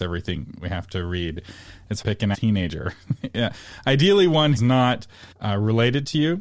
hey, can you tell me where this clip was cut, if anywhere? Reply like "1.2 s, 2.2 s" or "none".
2.0 s, 2.3 s, 4.6 s, 5.3 s